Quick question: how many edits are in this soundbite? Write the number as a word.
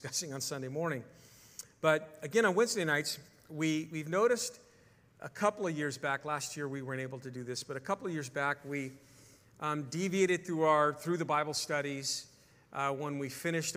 zero